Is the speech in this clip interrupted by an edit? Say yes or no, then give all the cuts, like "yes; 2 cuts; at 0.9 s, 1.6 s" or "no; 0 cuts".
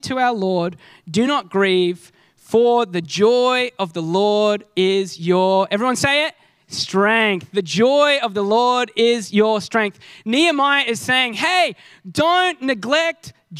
no; 0 cuts